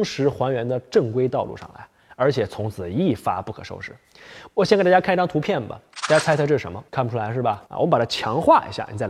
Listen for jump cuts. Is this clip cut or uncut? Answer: cut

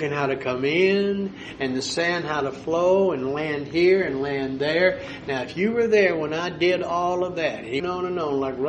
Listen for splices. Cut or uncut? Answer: cut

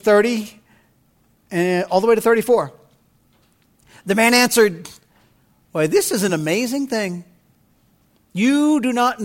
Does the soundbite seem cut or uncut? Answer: uncut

